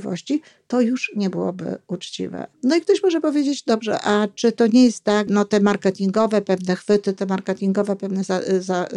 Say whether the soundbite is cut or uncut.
cut